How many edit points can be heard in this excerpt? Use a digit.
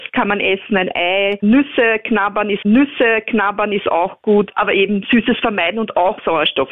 1